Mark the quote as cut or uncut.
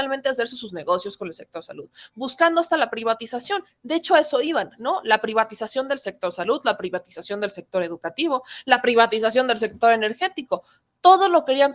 uncut